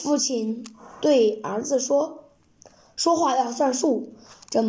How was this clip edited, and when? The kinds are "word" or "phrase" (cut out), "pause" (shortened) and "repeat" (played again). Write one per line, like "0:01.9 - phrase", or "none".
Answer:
none